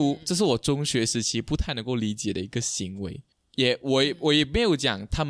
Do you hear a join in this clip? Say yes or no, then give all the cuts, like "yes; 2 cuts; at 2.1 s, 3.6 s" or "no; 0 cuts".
yes; 1 cut; at 3.3 s